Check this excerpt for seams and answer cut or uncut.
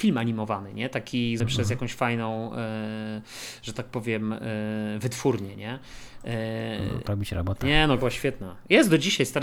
cut